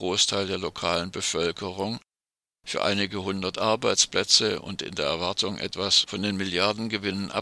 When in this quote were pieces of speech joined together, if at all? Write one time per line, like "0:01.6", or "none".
none

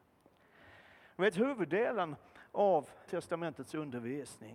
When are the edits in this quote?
0:03.1

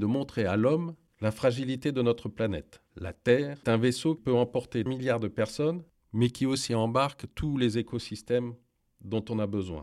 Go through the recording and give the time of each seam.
0:03.6
0:04.2
0:04.9

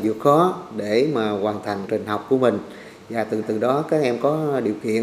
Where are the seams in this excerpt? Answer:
0:01.9
0:03.4

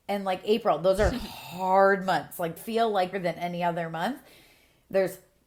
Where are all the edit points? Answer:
0:02.6
0:03.1

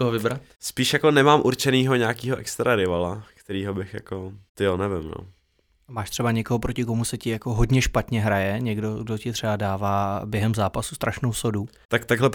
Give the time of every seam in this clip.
none

